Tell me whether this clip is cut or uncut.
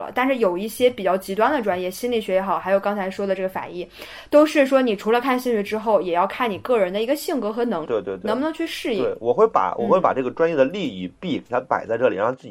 cut